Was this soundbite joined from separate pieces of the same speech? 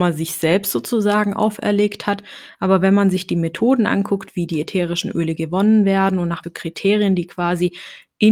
yes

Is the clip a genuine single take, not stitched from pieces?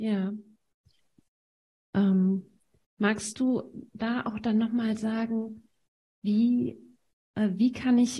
yes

